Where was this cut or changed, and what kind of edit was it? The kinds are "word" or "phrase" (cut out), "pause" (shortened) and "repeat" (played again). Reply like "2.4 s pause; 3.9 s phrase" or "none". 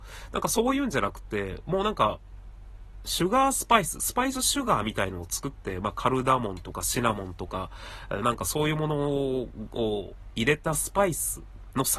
8.2 s phrase